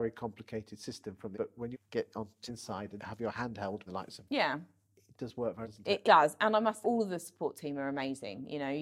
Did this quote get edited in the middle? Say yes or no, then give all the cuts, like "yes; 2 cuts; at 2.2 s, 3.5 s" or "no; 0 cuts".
yes; 9 cuts; at 1.3 s, 1.7 s, 2.5 s, 3.0 s, 3.9 s, 4.2 s, 5.6 s, 6.0 s, 6.8 s